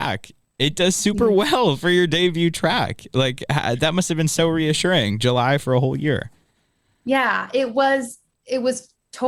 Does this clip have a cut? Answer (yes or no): no